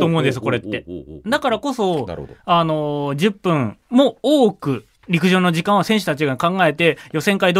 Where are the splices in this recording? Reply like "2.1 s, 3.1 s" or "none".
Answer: 3.8 s, 5.0 s